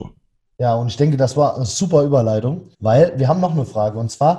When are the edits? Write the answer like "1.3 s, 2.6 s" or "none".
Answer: 2.7 s